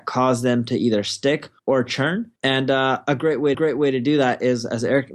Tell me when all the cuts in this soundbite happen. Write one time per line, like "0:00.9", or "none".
0:01.6
0:02.4
0:03.5

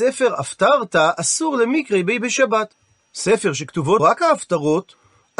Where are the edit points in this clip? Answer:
0:04.0

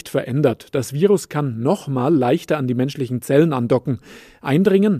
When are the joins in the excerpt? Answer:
none

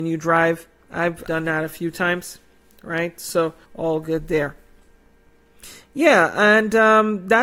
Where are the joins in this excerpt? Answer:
0:01.3
0:03.6

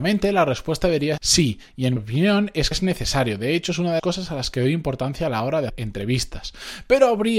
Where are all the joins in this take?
0:01.2
0:02.0
0:02.7
0:04.0
0:05.7

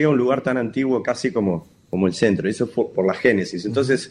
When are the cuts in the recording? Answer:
none

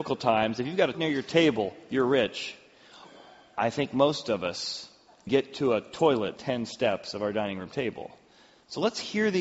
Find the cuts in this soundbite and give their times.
0:00.9
0:05.3
0:06.4

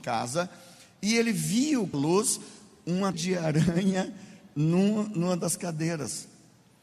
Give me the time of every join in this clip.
0:01.9
0:03.1

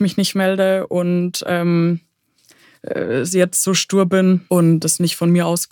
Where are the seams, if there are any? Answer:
none

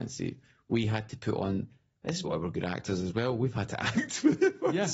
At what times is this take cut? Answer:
0:02.2

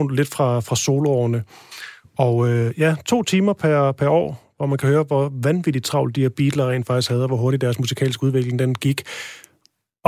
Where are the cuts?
none

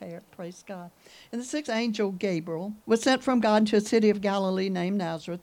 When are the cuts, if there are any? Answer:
0:01.7
0:02.8

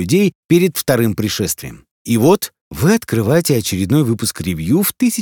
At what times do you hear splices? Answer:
0:02.6

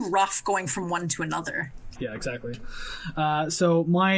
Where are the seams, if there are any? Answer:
0:02.0

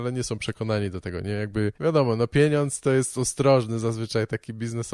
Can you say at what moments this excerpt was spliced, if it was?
0:01.7

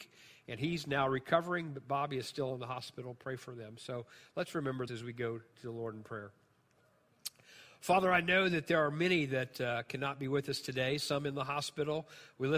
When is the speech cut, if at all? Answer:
0:04.9

